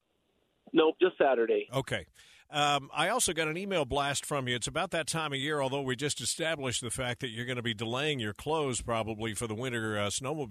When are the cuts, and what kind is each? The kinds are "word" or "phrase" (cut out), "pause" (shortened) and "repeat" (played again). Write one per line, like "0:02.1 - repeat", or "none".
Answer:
none